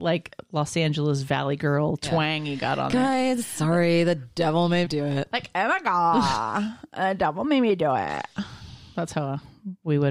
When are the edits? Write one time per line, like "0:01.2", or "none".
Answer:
0:04.8